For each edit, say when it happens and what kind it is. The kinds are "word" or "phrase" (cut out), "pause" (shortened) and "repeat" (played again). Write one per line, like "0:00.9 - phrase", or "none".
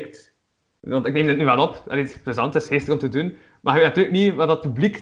none

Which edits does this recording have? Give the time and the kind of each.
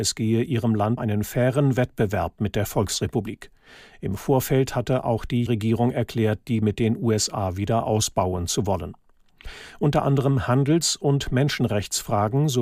0:01.0 - word
0:05.5 - word
0:06.6 - word

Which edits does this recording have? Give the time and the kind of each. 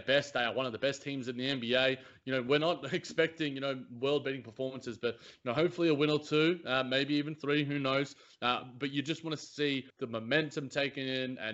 0:09.9 - pause

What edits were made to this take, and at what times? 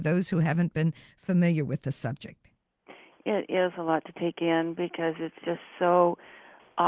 none

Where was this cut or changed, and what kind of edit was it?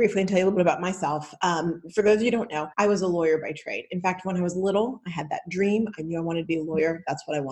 0:02.7 - pause

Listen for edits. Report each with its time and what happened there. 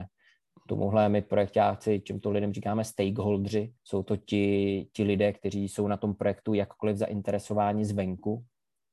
0:03.8 - pause

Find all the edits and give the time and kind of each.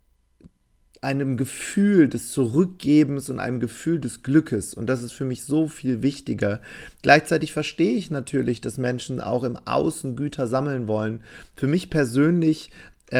none

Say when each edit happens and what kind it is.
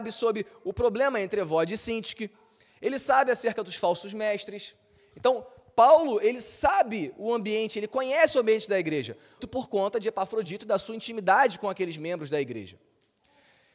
0:09.4 - word

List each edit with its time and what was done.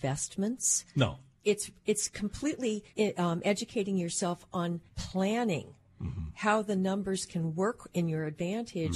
0:02.9 - pause
0:04.9 - pause

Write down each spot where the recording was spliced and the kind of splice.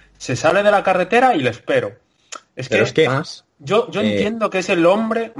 0:03.1 - phrase

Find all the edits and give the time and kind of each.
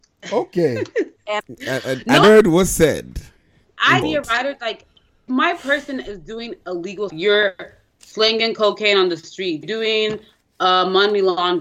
0:01.4 - word
0:02.2 - word
0:04.0 - word
0:05.3 - word
0:07.1 - word
0:09.6 - word

